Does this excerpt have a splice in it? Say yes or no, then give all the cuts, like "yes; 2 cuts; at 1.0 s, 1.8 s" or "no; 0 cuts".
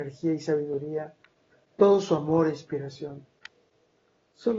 no; 0 cuts